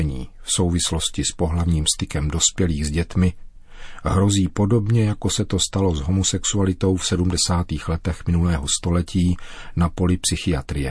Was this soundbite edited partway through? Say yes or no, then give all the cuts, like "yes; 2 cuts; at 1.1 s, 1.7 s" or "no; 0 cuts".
no; 0 cuts